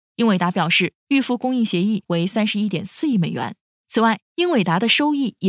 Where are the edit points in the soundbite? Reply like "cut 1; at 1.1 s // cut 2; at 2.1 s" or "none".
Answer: none